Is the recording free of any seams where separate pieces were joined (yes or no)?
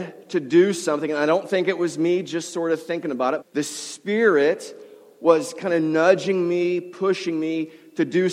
no